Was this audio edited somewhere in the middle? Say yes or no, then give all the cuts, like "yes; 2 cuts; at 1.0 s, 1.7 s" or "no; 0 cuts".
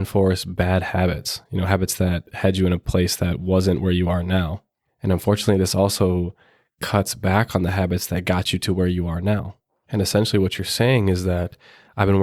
no; 0 cuts